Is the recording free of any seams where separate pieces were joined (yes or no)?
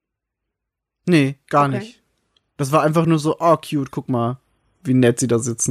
yes